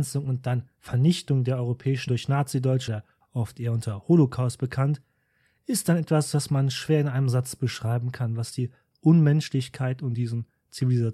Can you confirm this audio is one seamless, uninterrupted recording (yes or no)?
no